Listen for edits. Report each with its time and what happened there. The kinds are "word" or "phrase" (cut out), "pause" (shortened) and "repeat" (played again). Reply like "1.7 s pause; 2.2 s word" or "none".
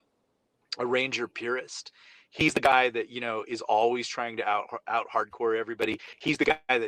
none